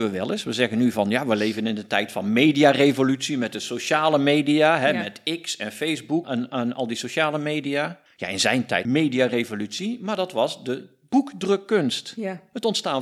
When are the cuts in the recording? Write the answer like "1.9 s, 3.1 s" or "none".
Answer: 6.2 s, 8.1 s, 8.8 s